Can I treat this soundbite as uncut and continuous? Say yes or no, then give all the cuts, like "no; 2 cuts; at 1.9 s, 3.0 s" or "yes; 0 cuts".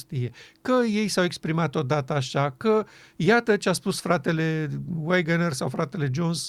yes; 0 cuts